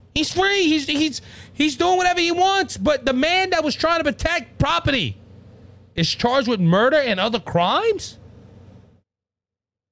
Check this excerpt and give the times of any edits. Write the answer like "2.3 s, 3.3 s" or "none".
4.6 s

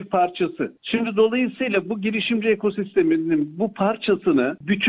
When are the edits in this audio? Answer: none

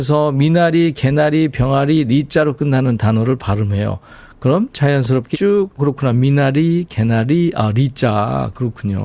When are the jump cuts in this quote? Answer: 5.3 s, 5.8 s

